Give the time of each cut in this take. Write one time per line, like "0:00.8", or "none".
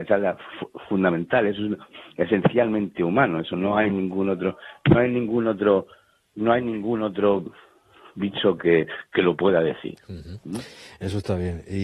none